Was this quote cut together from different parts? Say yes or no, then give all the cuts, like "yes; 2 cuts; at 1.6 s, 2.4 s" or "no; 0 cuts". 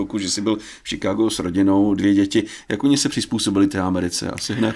no; 0 cuts